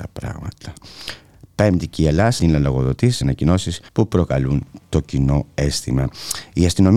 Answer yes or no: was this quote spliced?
yes